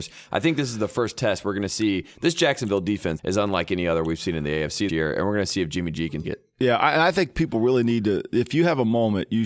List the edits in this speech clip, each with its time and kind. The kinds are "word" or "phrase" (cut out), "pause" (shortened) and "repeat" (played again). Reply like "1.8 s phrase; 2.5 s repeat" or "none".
3.2 s phrase; 4.9 s word; 6.2 s word